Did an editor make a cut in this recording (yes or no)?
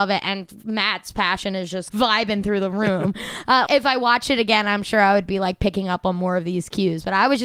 yes